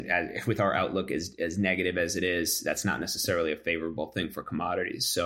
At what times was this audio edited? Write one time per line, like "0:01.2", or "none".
none